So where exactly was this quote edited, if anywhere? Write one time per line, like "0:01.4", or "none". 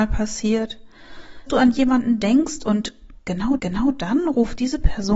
0:01.5
0:03.6